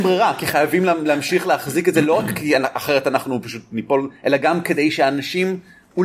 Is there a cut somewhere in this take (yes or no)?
no